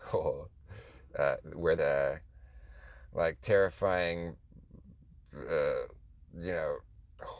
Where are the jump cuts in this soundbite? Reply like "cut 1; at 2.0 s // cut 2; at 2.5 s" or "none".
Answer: cut 1; at 1.8 s